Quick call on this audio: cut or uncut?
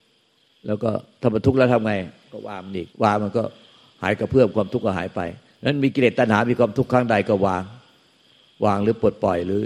cut